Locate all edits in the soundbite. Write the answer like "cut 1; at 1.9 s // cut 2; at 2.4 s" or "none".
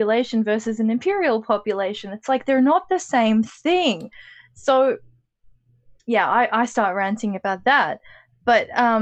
none